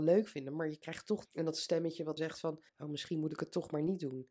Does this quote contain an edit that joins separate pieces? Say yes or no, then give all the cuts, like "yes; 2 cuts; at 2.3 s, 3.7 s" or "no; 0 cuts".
yes; 3 cuts; at 1.2 s, 2.2 s, 2.7 s